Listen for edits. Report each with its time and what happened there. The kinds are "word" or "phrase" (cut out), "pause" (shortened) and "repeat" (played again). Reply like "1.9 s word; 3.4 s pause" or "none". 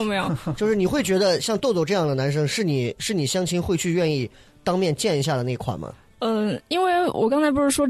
none

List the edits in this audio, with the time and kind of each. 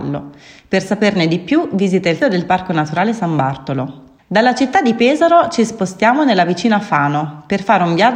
2.2 s word; 4.2 s pause

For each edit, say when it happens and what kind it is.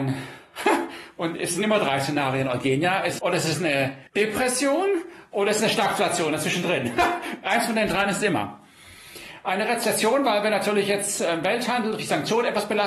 3.2 s phrase; 4.1 s pause

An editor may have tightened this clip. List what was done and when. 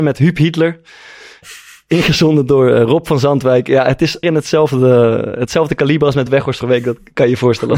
4.2 s word; 6.3 s word; 6.6 s word

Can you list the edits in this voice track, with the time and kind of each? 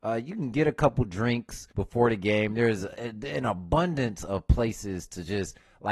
none

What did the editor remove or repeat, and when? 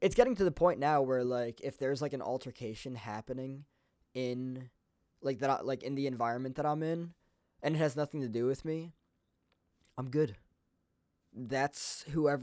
none

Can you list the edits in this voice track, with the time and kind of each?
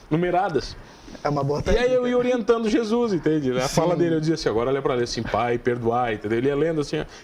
none

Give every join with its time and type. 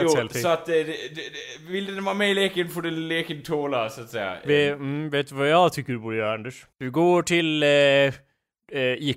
6.7 s pause

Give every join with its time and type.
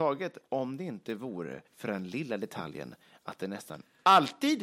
1.7 s pause

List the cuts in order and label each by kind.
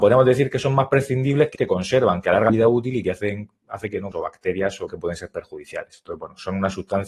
1.5 s word; 2.5 s word; 4.1 s phrase; 4.9 s word

